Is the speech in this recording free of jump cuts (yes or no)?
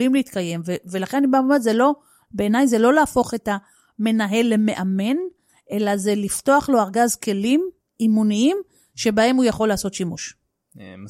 yes